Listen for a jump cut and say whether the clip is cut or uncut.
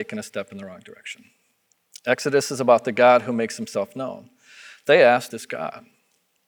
cut